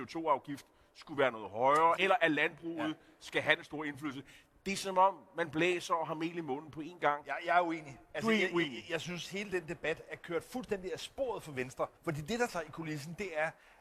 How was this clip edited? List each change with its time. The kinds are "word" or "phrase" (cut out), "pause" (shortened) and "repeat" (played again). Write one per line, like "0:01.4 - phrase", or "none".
0:02.0 - word
0:12.0 - pause
0:12.5 - word